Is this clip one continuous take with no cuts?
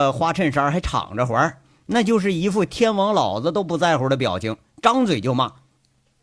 yes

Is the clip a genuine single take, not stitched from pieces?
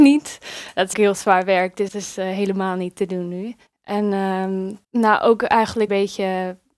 no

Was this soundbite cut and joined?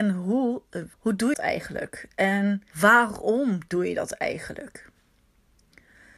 yes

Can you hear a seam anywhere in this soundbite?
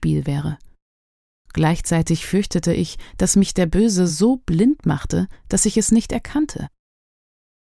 no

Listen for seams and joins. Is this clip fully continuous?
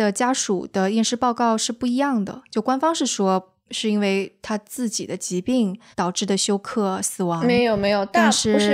no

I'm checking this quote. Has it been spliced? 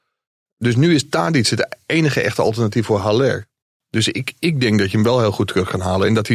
no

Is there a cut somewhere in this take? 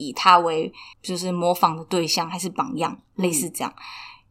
yes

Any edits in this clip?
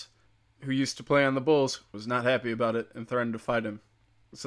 no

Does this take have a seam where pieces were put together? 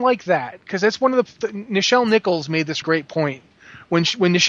yes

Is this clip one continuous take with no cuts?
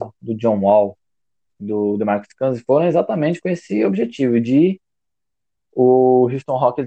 yes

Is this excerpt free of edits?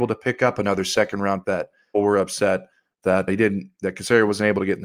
no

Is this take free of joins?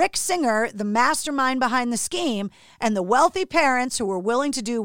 yes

